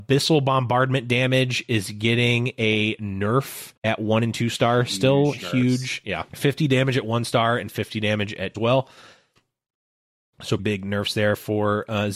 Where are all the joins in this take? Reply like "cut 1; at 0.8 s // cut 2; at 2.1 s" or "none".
cut 1; at 3.8 s // cut 2; at 6.3 s // cut 3; at 8.5 s // cut 4; at 10.6 s